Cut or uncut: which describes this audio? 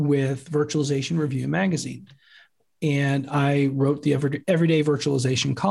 uncut